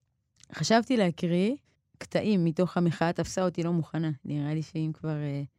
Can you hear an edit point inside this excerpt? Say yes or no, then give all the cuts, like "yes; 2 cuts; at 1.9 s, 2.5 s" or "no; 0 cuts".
yes; 1 cut; at 1.6 s